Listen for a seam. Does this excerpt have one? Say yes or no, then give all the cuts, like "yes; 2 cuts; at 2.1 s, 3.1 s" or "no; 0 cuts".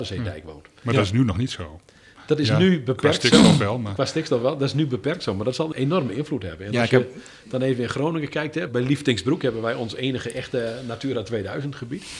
yes; 2 cuts; at 5.7 s, 8.7 s